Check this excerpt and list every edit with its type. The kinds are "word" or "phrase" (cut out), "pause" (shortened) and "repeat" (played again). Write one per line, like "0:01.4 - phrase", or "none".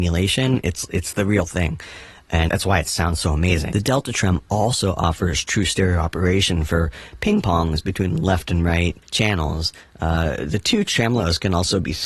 0:02.5 - word
0:09.0 - pause